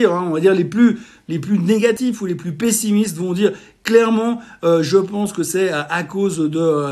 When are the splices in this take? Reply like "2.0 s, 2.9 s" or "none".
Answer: none

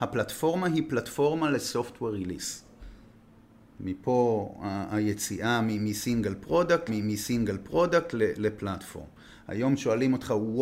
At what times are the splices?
6.9 s

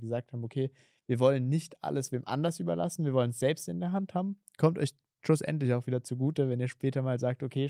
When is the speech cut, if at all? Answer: none

